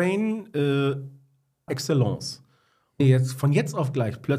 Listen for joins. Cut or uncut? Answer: cut